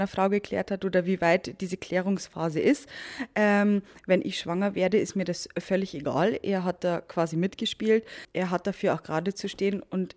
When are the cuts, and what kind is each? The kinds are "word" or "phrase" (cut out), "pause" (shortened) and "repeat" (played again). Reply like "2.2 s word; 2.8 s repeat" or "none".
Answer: none